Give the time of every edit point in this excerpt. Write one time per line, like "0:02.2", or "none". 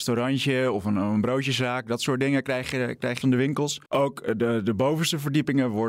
0:03.2
0:03.9